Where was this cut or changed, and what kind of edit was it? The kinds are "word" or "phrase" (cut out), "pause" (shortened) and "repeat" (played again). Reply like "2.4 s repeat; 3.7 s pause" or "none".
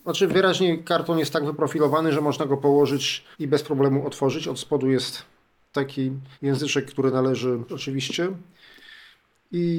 3.3 s pause; 6.3 s pause; 7.7 s word